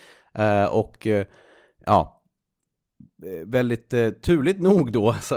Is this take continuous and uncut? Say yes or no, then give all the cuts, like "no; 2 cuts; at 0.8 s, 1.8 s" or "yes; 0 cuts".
yes; 0 cuts